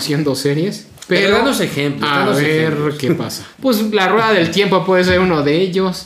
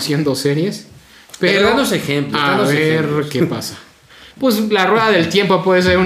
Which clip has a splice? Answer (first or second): first